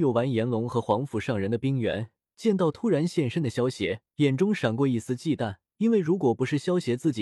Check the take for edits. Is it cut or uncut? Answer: cut